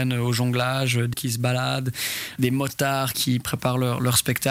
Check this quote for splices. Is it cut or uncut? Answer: cut